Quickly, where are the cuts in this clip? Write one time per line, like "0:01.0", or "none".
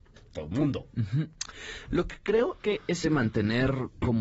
0:02.6
0:03.0